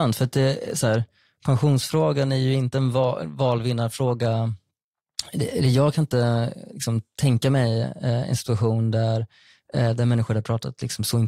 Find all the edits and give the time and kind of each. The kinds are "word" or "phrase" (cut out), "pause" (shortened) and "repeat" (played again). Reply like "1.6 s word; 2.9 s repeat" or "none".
none